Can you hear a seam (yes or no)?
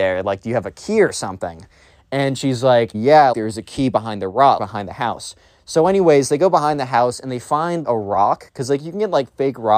yes